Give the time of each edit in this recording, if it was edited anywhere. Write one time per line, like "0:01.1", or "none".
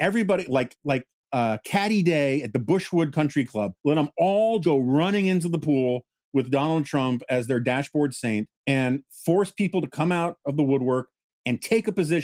0:03.8
0:04.6
0:08.6